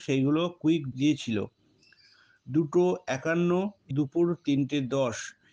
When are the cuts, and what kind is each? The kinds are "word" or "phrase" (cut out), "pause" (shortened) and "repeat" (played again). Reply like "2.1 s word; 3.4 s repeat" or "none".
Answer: 0.9 s word; 3.9 s word